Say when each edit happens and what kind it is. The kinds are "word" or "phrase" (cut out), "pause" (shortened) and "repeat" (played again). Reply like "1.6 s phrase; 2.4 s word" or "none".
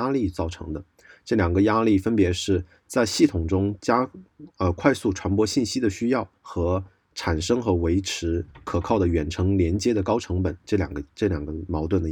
6.3 s pause